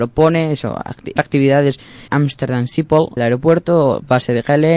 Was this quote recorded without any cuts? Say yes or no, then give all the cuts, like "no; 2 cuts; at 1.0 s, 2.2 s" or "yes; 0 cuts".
no; 3 cuts; at 1.2 s, 2.1 s, 3.2 s